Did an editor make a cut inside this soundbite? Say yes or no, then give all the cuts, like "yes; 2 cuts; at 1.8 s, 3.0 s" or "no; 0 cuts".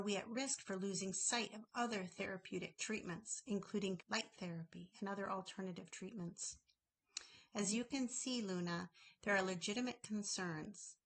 yes; 1 cut; at 4.0 s